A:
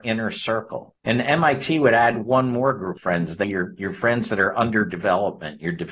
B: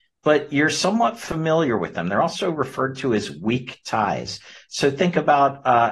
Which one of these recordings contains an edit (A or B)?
A